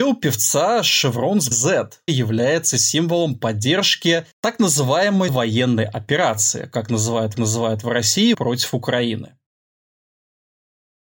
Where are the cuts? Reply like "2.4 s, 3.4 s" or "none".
1.5 s, 2.1 s, 4.3 s, 5.3 s, 7.3 s, 8.3 s